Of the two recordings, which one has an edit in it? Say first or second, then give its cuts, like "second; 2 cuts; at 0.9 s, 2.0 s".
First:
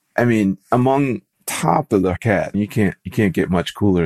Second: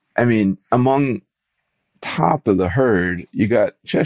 first; 3 cuts; at 1.3 s, 2.2 s, 2.5 s